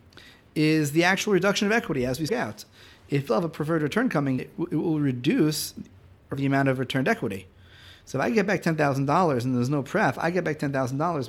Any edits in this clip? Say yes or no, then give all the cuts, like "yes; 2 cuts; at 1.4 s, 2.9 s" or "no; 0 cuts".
yes; 4 cuts; at 2.3 s, 3.3 s, 4.4 s, 6.3 s